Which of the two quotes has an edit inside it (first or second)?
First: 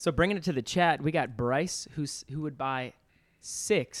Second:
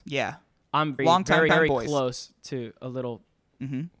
second